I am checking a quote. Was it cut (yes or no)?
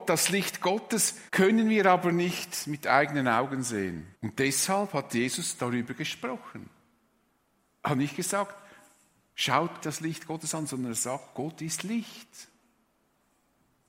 yes